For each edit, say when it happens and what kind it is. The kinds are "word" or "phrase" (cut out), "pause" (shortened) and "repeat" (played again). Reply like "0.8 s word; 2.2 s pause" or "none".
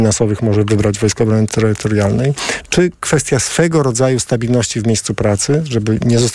none